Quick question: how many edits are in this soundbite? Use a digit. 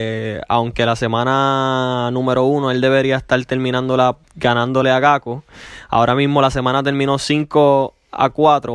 1